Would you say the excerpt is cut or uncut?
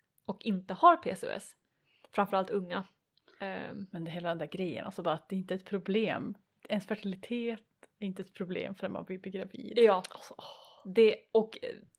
uncut